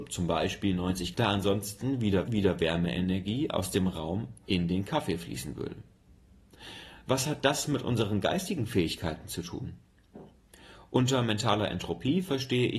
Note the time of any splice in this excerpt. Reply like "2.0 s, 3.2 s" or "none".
1.1 s, 2.3 s